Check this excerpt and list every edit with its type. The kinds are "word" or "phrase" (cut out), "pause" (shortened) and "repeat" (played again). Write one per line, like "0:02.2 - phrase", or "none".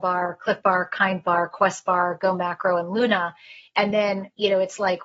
none